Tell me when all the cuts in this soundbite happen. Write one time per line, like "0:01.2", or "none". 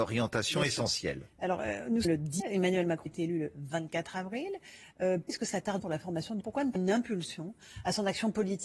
0:02.0
0:02.4
0:03.1
0:05.3
0:05.8
0:06.4
0:06.8